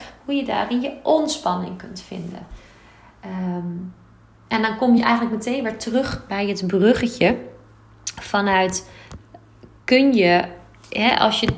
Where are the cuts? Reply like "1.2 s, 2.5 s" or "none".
none